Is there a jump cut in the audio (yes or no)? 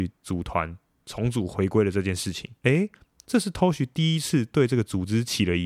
yes